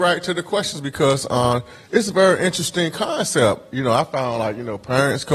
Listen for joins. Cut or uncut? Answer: uncut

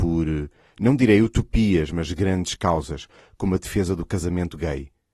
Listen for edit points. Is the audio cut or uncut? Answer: uncut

